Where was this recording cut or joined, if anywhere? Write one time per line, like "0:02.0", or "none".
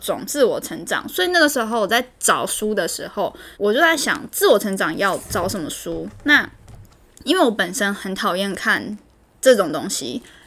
0:03.5